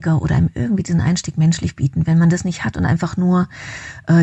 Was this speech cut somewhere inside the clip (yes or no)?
no